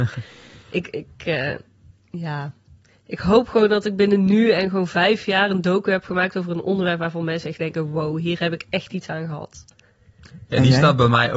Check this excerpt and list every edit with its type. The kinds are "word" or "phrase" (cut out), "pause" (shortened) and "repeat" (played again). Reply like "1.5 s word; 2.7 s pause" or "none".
none